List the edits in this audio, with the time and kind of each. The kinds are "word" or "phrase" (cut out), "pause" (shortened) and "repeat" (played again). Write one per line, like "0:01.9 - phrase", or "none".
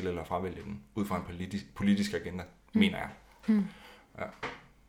none